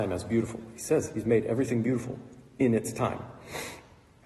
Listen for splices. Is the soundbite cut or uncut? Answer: uncut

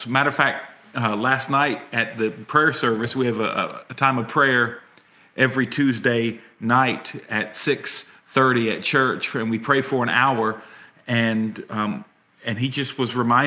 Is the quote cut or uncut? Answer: uncut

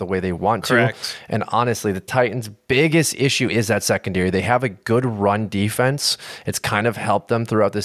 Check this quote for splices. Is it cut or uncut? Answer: uncut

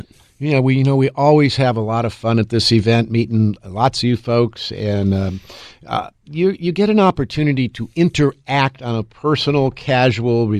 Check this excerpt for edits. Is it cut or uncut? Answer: uncut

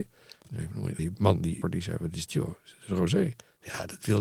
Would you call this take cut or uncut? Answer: cut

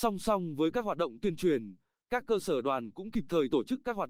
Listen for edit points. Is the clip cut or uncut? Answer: uncut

